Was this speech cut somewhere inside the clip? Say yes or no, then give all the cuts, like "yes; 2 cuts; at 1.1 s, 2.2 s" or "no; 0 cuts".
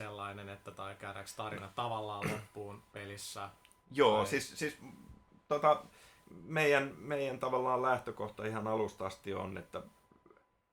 no; 0 cuts